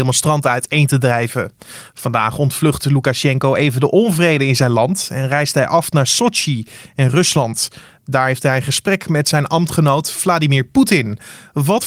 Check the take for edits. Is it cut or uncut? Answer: uncut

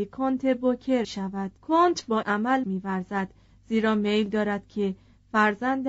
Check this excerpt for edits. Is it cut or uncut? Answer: cut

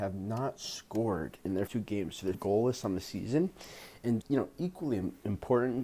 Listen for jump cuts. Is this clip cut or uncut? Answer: cut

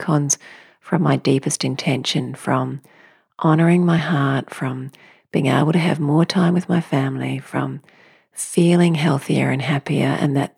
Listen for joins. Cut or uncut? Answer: uncut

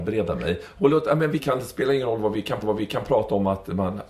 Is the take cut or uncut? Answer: cut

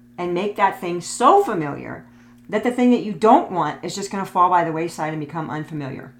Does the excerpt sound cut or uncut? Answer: uncut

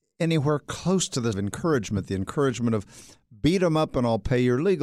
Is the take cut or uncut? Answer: cut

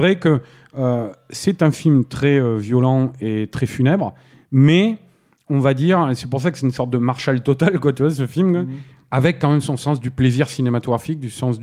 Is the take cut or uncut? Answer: uncut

